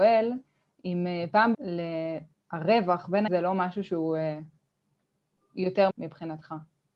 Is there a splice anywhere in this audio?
yes; 3 cuts; at 1.5 s, 3.3 s, 5.9 s

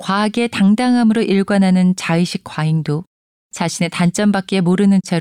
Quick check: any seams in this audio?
no; 0 cuts

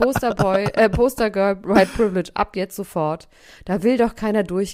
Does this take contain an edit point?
no; 0 cuts

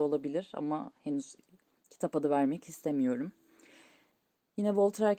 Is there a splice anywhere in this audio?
no; 0 cuts

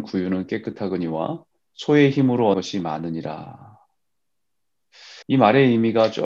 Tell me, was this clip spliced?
yes; 3 cuts; at 1.5 s, 2.5 s, 5.2 s

